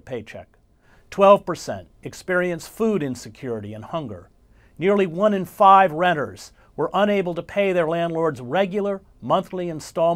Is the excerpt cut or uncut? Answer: uncut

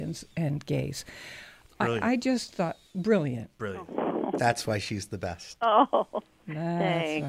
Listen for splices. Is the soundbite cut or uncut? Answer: uncut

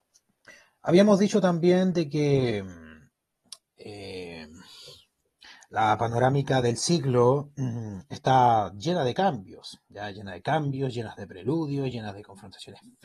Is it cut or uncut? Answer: uncut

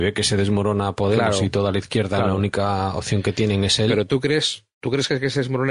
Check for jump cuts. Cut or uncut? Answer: uncut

